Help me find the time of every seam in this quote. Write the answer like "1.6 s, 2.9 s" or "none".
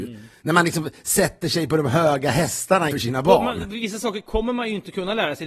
2.9 s